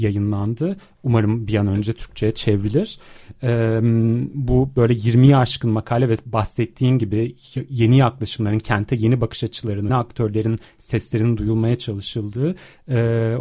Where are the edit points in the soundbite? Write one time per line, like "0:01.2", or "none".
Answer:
0:09.9